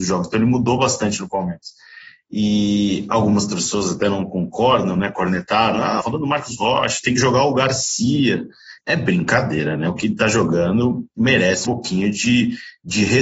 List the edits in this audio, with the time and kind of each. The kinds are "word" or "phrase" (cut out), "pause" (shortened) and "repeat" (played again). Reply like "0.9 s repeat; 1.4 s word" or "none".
6.0 s word; 8.8 s word; 11.6 s word